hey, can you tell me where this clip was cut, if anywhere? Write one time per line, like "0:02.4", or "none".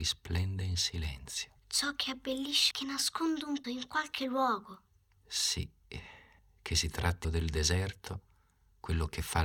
0:01.6
0:02.7
0:03.6
0:06.4
0:07.2